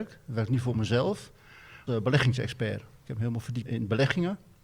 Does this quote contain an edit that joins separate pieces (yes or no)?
yes